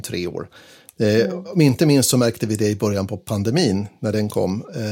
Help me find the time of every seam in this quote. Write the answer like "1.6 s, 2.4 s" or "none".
none